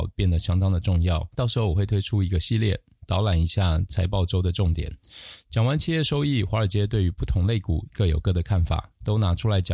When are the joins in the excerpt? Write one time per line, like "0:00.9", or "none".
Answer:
0:01.3